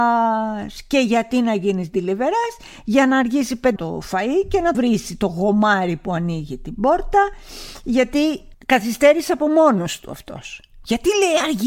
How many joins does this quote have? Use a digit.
3